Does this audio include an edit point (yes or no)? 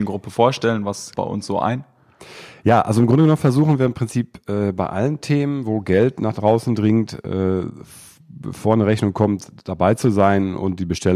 yes